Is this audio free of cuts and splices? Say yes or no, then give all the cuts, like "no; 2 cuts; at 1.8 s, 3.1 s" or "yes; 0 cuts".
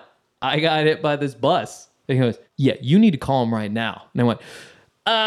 no; 1 cut; at 2.5 s